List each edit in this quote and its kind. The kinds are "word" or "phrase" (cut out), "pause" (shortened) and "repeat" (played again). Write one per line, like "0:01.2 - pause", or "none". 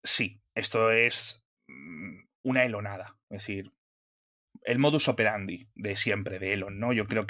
none